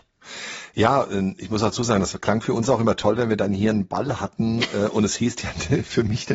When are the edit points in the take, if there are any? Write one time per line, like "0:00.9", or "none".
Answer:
none